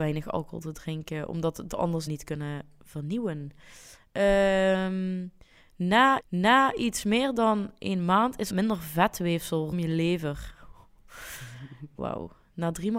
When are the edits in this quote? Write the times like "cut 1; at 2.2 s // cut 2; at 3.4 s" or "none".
cut 1; at 2.1 s // cut 2; at 6.2 s // cut 3; at 8.5 s // cut 4; at 9.7 s // cut 5; at 12.0 s